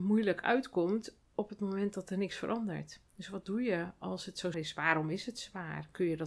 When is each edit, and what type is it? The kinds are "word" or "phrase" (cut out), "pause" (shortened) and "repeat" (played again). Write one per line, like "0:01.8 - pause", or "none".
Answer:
0:01.3 - pause
0:03.1 - pause
0:04.5 - word